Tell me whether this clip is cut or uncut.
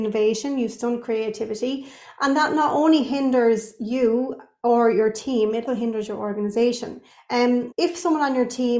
cut